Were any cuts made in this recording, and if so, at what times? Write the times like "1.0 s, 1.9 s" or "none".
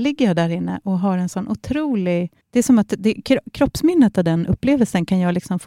2.4 s